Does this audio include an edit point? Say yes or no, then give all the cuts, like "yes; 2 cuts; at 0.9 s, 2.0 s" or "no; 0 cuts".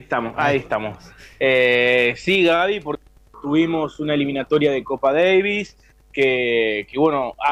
yes; 1 cut; at 3.3 s